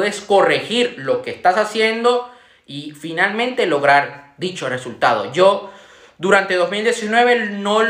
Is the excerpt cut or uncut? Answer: uncut